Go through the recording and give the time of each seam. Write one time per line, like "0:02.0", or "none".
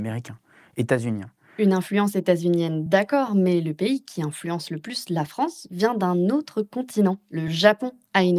none